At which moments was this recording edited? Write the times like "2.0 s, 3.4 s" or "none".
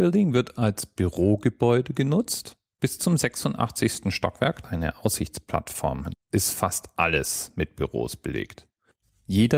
4.6 s, 6.1 s

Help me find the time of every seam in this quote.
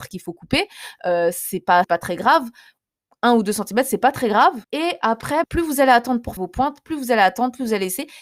1.8 s, 4.6 s, 5.4 s, 6.4 s

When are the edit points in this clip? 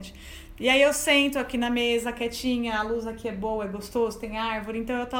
none

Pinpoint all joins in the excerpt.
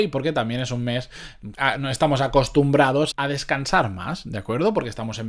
1.5 s, 3.1 s

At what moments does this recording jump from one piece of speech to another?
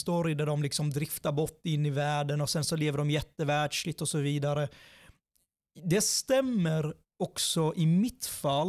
none

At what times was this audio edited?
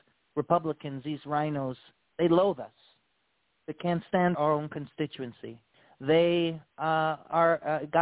4.3 s

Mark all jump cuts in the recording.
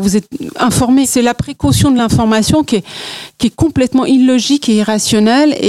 none

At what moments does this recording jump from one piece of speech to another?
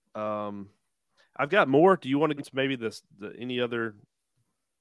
2.4 s

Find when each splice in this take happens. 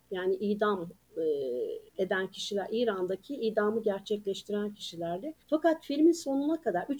1.9 s, 5.4 s

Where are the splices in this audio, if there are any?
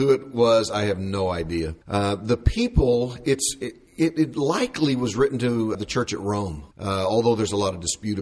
1.8 s, 5.7 s, 6.7 s

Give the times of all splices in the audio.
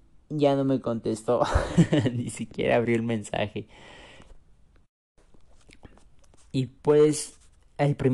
6.8 s

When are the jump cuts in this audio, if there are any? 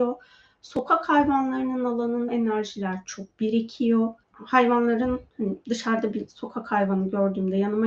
2.3 s, 4.2 s

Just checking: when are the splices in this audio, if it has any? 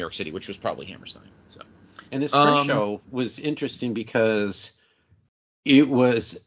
2.1 s

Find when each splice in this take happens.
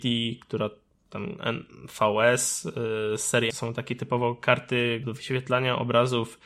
3.5 s, 5.0 s

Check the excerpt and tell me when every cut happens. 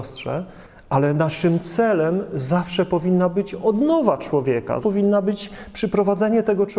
4.8 s

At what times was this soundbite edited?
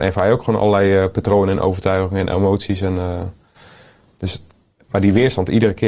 none

